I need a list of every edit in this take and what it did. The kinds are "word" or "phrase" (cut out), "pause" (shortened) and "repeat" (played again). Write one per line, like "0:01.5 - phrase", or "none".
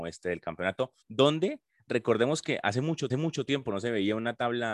0:01.0 - pause
0:03.1 - repeat